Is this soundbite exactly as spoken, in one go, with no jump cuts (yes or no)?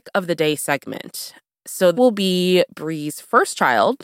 no